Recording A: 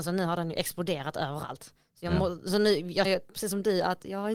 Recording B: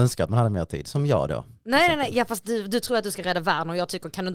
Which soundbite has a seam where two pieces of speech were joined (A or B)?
A